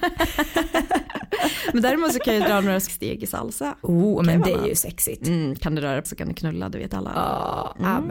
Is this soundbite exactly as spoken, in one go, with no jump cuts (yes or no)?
no